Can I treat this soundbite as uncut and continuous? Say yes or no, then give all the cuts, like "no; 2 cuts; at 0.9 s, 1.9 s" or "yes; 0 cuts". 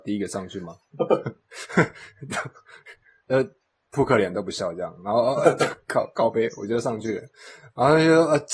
yes; 0 cuts